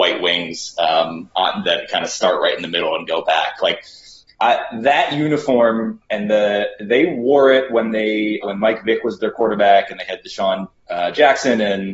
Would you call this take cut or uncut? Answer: cut